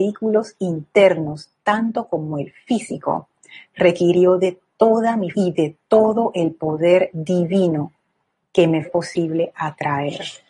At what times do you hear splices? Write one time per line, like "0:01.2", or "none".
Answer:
0:05.3
0:08.8